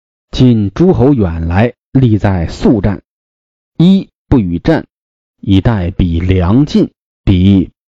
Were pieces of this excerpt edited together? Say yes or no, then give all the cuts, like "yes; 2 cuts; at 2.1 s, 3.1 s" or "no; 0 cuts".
no; 0 cuts